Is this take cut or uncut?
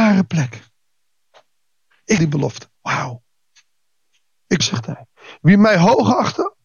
cut